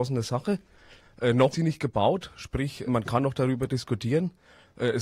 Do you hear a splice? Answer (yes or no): yes